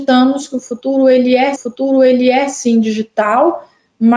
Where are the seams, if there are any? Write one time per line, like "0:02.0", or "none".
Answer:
0:01.6